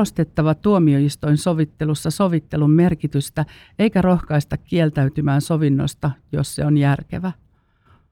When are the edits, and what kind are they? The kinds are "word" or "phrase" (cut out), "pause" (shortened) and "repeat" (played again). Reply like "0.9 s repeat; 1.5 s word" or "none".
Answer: none